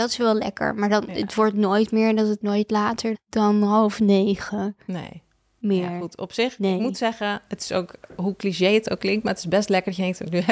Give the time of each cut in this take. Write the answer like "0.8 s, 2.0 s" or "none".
2.4 s, 3.1 s